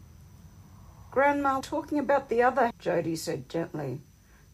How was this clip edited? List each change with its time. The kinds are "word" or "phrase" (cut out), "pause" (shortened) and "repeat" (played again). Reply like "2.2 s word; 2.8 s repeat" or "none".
1.6 s word; 2.7 s word